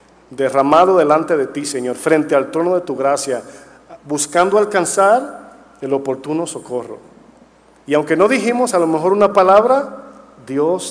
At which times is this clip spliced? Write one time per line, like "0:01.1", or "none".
none